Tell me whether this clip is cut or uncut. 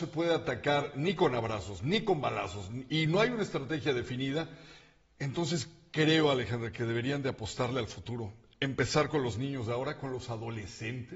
uncut